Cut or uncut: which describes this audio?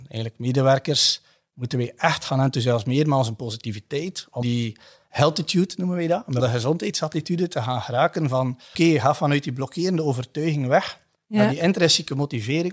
cut